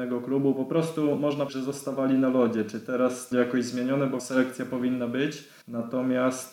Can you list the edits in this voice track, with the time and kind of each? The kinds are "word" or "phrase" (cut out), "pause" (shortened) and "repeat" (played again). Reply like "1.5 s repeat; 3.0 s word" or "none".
1.5 s word; 3.3 s phrase; 4.2 s word; 5.6 s pause